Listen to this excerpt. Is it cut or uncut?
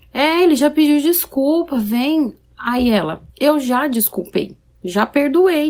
cut